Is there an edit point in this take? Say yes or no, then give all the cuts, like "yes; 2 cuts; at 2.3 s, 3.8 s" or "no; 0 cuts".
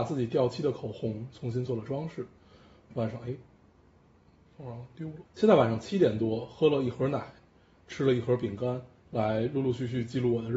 yes; 1 cut; at 5.3 s